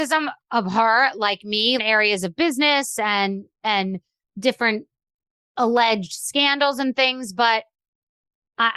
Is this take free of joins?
no; 2 cuts; at 1.8 s, 4.2 s

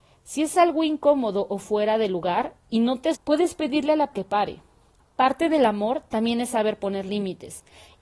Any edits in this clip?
yes; 2 cuts; at 3.1 s, 4.1 s

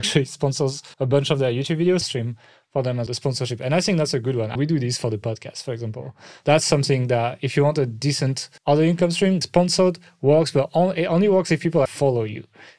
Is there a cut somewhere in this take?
yes; 7 cuts; at 0.9 s, 2.0 s, 3.1 s, 4.6 s, 8.6 s, 9.4 s, 11.9 s

